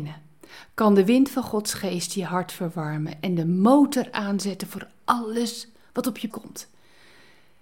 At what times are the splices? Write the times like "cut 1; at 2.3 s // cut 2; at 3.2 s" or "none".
cut 1; at 6.3 s